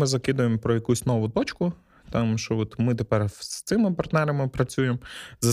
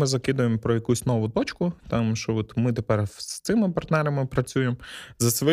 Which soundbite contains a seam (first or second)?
second